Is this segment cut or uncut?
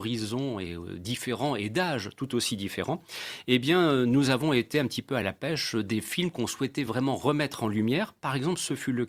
uncut